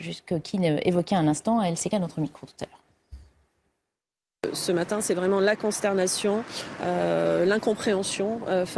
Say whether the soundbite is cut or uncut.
cut